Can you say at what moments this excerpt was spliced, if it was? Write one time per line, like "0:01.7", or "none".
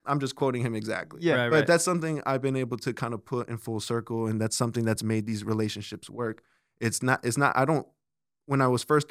none